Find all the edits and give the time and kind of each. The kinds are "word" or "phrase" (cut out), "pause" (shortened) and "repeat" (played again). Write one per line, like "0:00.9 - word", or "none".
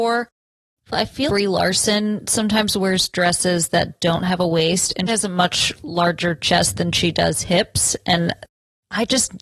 0:00.9 - word
0:01.3 - word
0:05.1 - word